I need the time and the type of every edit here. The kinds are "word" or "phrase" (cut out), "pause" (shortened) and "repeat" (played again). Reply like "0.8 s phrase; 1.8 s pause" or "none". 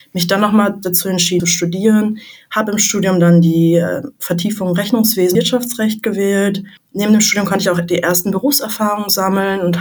1.4 s word; 5.3 s word